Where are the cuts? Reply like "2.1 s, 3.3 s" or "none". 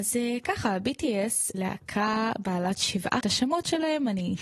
1.5 s, 3.2 s